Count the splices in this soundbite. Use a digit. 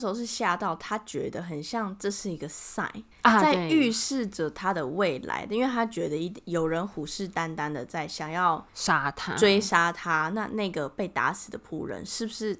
2